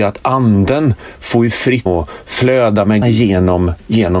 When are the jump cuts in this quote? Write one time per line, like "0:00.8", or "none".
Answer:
0:01.9
0:03.0